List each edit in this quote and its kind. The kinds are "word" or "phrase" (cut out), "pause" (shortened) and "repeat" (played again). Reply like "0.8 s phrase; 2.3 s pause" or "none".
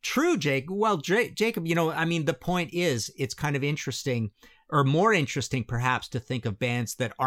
none